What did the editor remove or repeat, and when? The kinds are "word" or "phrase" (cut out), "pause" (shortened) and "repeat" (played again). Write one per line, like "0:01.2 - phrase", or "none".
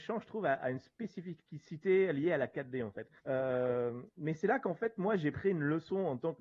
0:03.2 - pause